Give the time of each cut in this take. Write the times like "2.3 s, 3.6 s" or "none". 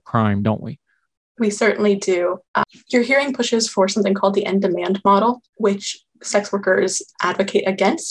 1.0 s, 2.4 s, 5.5 s, 7.1 s